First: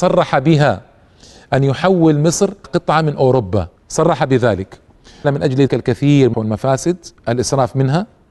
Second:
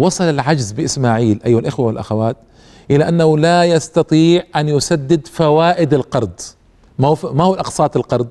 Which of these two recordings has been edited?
first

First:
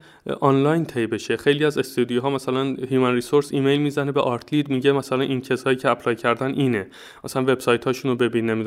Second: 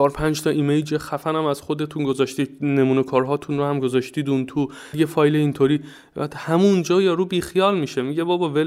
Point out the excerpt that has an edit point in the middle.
second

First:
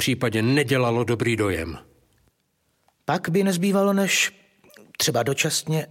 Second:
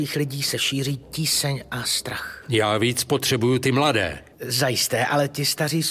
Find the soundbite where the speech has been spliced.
second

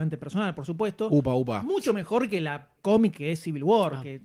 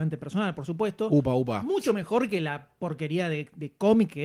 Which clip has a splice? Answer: first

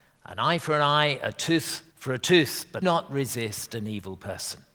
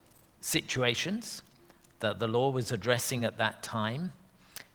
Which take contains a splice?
first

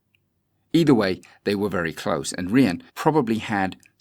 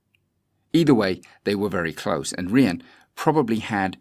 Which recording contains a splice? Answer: first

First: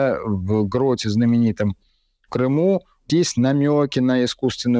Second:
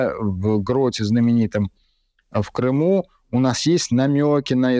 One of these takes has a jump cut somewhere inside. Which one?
first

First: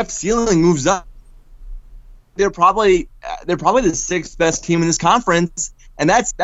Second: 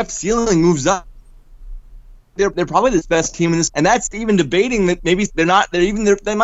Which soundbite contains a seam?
second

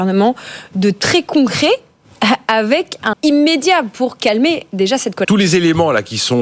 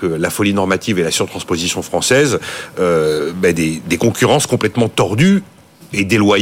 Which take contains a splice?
first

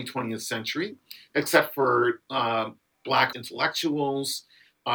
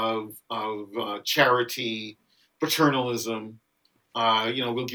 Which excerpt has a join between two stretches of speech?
first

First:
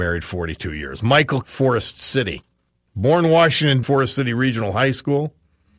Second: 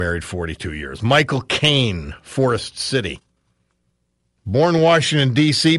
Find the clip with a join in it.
first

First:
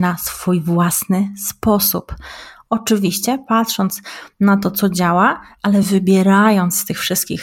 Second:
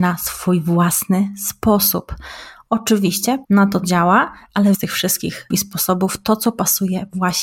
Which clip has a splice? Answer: second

